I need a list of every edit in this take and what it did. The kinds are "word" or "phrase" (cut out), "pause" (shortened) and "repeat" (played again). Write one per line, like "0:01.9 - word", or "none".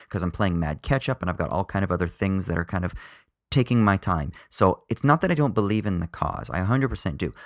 none